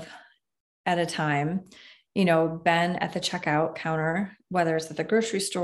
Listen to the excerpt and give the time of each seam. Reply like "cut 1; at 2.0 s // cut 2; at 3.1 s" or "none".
none